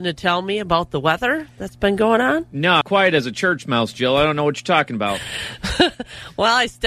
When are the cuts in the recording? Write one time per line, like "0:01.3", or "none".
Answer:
0:02.8

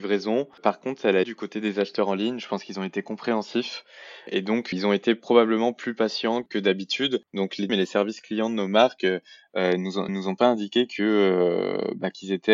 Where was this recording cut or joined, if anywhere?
0:01.2
0:04.7
0:07.3
0:07.7
0:10.1

